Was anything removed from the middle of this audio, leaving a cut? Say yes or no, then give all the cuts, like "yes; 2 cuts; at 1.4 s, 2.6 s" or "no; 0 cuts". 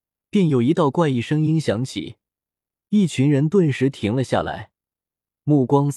no; 0 cuts